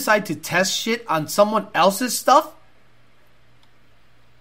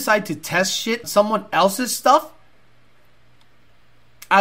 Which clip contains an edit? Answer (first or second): second